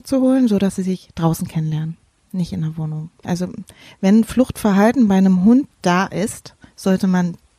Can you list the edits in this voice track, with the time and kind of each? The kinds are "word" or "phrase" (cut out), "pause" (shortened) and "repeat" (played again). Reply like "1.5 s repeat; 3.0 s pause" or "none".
none